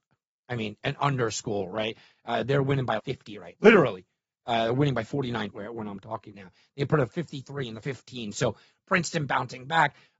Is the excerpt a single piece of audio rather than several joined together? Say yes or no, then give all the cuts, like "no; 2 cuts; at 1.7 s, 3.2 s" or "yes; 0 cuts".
no; 5 cuts; at 3.0 s, 3.5 s, 5.5 s, 6.3 s, 7.8 s